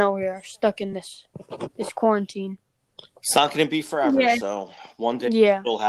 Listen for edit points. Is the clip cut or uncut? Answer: uncut